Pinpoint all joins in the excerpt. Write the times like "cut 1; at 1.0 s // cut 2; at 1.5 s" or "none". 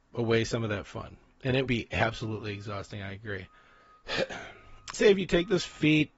cut 1; at 1.7 s // cut 2; at 4.9 s